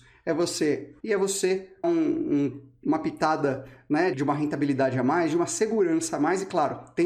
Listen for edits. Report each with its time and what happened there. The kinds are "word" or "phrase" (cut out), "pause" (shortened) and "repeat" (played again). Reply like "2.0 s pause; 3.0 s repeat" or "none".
1.0 s word; 1.8 s word; 4.1 s word